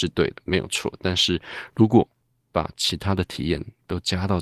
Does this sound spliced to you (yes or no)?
no